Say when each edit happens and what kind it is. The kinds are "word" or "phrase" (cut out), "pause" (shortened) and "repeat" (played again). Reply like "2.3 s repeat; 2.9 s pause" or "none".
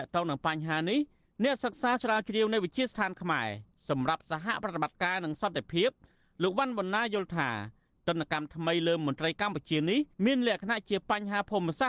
10.1 s pause